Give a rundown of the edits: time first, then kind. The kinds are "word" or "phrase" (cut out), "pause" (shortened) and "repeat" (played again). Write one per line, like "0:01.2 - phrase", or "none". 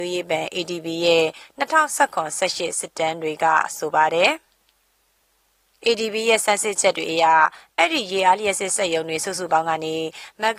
none